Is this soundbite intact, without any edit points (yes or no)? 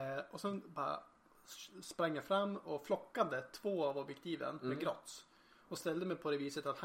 yes